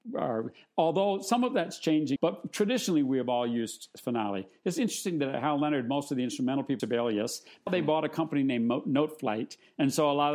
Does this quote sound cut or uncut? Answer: cut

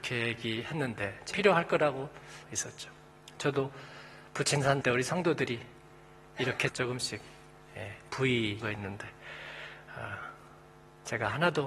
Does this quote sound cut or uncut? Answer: cut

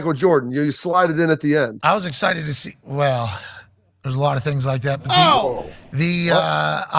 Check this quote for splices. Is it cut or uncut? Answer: uncut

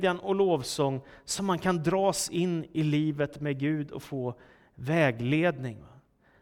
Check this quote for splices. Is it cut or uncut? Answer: uncut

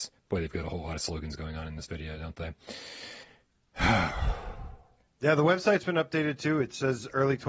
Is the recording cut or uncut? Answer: cut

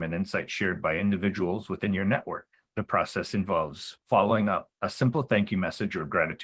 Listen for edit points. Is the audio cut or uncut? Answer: uncut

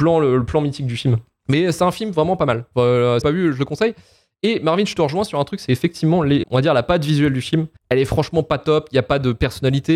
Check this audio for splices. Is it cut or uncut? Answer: cut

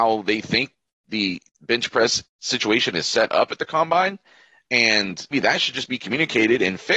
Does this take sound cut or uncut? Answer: cut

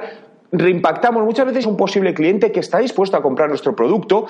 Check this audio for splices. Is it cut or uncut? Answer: cut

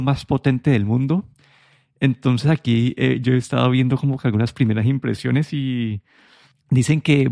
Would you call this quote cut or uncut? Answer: uncut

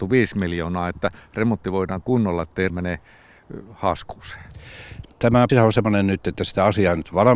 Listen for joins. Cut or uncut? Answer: cut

